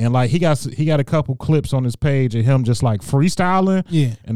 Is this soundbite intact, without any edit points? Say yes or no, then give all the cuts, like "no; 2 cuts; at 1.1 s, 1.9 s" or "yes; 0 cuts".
yes; 0 cuts